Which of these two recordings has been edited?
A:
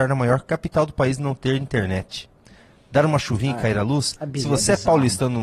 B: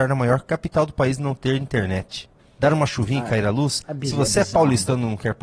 B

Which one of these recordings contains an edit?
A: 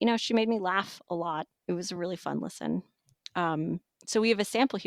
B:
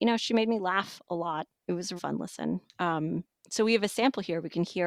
B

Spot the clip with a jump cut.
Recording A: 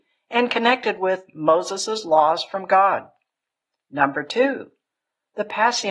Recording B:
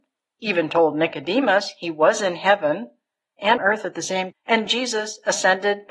B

